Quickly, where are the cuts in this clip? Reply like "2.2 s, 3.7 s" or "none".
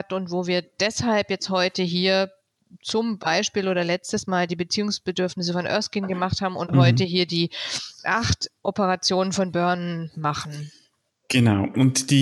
none